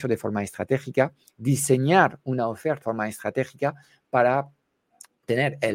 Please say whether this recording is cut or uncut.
cut